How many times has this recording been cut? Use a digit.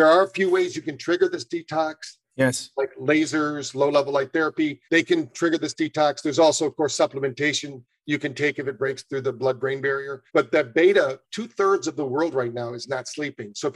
2